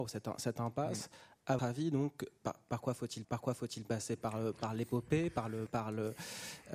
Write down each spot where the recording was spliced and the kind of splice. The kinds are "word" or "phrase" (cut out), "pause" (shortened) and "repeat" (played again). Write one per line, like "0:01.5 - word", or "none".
0:01.6 - word
0:02.4 - word
0:03.2 - repeat
0:05.7 - word